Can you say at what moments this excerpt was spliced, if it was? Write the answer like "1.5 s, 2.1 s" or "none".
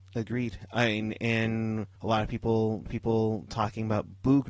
2.0 s, 2.9 s